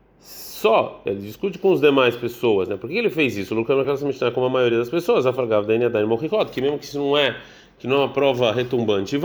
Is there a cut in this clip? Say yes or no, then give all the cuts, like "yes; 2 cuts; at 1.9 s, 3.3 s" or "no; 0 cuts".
yes; 1 cut; at 3.8 s